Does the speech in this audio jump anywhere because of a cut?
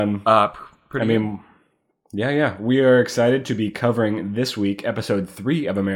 no; 0 cuts

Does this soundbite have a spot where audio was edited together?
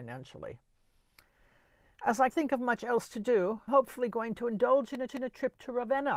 yes; 3 cuts; at 2.3 s, 3.7 s, 5.1 s

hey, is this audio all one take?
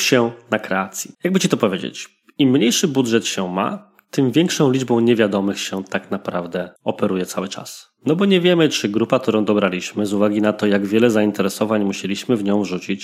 no; 2 cuts; at 1.1 s, 6.8 s

